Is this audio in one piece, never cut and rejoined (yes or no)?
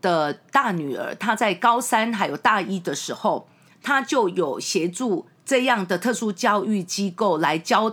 yes